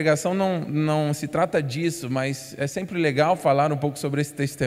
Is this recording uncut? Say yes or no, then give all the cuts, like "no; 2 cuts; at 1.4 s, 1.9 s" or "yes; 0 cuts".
yes; 0 cuts